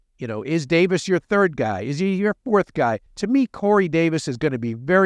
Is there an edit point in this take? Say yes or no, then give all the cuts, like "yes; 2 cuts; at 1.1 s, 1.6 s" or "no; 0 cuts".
yes; 1 cut; at 3.1 s